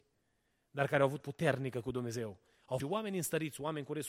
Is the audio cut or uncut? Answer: cut